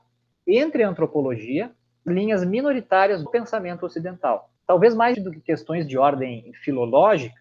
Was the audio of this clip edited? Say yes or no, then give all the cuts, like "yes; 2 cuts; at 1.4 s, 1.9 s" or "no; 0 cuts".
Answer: yes; 4 cuts; at 2.1 s, 3.3 s, 4.6 s, 5.1 s